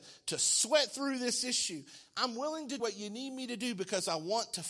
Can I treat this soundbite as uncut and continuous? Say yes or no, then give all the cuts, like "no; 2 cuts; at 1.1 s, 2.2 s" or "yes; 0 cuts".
no; 1 cut; at 2.8 s